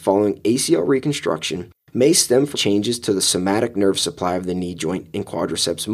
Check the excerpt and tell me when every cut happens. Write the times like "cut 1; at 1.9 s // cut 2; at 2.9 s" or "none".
cut 1; at 2.5 s